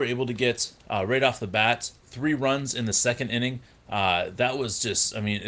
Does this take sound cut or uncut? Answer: uncut